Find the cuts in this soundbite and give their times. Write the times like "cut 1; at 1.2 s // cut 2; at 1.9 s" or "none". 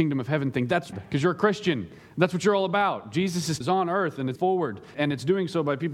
cut 1; at 0.9 s // cut 2; at 3.6 s // cut 3; at 4.4 s // cut 4; at 4.9 s